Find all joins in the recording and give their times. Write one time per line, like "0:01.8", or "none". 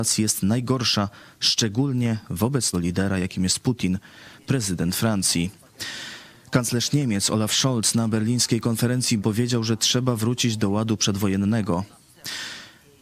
0:02.7
0:04.4
0:09.2